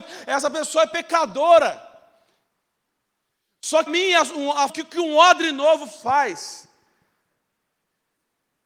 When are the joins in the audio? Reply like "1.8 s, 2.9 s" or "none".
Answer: 3.9 s, 4.7 s